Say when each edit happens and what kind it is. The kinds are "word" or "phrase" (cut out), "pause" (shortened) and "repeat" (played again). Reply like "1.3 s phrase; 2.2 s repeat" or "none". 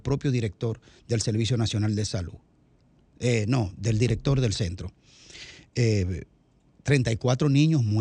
none